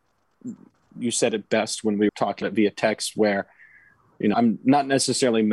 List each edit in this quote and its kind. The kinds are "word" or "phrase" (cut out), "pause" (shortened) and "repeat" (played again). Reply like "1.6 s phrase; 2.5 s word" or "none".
2.1 s word; 2.4 s word; 4.3 s word